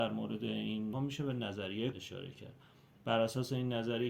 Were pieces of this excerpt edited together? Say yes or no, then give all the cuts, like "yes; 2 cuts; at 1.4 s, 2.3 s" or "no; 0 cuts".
yes; 2 cuts; at 0.9 s, 1.9 s